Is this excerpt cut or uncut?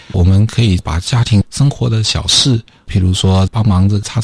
uncut